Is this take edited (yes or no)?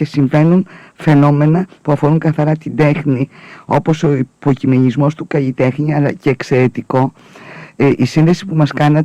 no